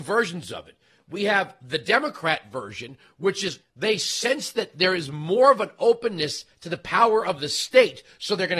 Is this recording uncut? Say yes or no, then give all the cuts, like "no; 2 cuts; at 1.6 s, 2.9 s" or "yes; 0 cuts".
no; 1 cut; at 3.6 s